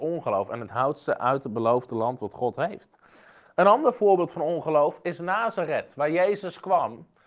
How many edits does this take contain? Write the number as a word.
zero